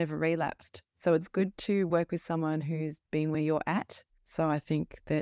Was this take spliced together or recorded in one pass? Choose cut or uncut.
uncut